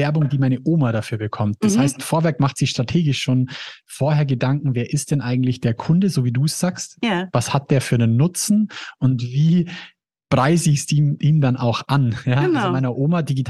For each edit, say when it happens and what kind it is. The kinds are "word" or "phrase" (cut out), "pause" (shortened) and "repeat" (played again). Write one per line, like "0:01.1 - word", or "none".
none